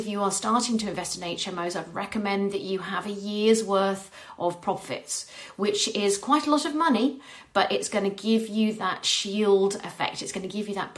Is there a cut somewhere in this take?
no; 0 cuts

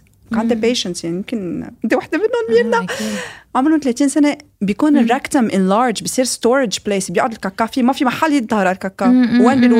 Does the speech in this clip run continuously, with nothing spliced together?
yes; 0 cuts

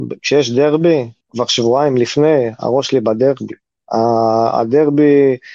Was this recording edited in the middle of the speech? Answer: no; 0 cuts

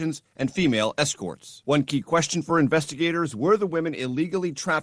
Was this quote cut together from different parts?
no; 0 cuts

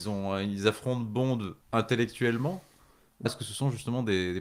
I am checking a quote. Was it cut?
yes; 2 cuts; at 1.6 s, 3.3 s

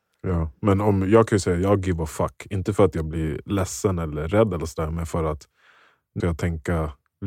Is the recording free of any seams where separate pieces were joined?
no; 1 cut; at 6.2 s

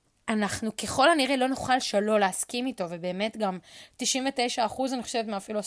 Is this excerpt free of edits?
yes; 0 cuts

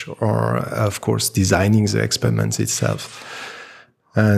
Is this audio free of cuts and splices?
yes; 0 cuts

